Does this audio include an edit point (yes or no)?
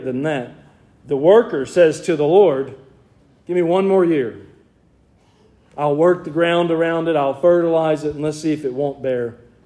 no